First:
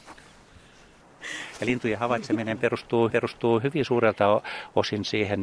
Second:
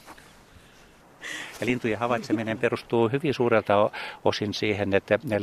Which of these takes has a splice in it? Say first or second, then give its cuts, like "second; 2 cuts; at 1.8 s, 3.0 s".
first; 1 cut; at 3.1 s